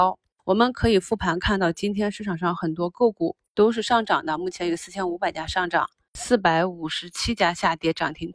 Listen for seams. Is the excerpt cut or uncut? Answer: uncut